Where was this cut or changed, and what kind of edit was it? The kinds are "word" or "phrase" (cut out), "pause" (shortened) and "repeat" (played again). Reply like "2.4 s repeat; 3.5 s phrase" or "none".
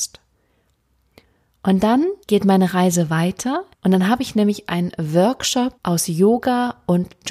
2.2 s pause; 3.7 s pause; 5.8 s pause